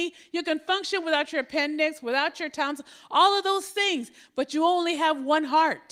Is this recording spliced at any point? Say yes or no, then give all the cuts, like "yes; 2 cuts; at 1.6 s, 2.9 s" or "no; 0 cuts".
no; 0 cuts